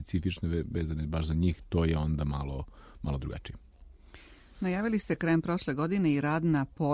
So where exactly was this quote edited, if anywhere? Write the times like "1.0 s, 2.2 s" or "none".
none